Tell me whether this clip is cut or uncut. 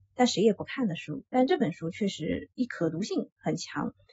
cut